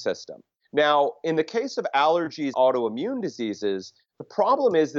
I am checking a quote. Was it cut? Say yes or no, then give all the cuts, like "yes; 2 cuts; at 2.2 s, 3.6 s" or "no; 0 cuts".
yes; 1 cut; at 2.5 s